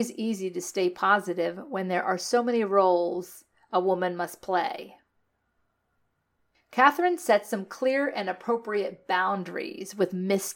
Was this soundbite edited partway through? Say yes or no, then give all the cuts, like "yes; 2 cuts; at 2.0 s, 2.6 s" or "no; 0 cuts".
no; 0 cuts